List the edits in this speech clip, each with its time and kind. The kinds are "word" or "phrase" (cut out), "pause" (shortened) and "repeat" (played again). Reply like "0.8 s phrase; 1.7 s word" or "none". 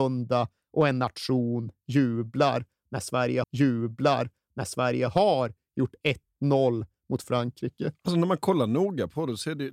3.4 s repeat; 7.2 s phrase

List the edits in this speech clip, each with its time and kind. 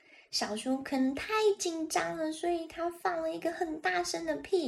none

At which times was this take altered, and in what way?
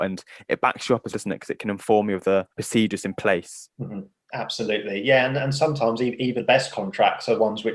1.1 s word; 2.5 s pause; 3.7 s pause; 6.4 s word

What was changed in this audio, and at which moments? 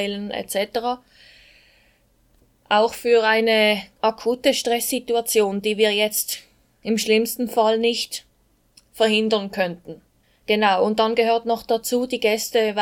none

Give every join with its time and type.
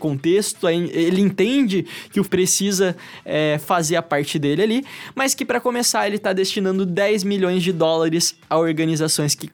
2.2 s word

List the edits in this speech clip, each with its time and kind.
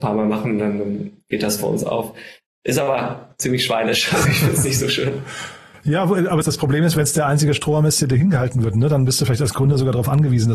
6.4 s word

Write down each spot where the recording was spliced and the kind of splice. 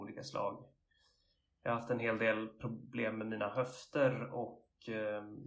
none

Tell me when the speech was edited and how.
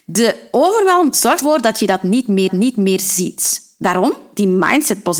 1.4 s word; 2.5 s repeat

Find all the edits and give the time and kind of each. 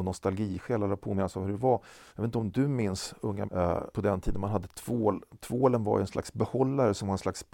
2.1 s pause; 3.4 s word; 3.9 s word

